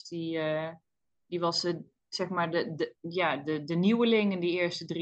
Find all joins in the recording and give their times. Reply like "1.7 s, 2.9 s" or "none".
none